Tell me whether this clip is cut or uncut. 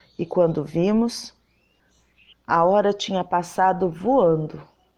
cut